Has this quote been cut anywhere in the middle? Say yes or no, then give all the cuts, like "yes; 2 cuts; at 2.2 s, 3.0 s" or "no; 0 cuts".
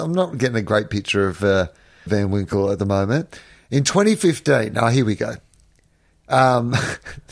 yes; 1 cut; at 2.1 s